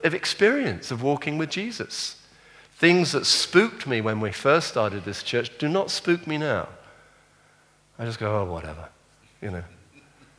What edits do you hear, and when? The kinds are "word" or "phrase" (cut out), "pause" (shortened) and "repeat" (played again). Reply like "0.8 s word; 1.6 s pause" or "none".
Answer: none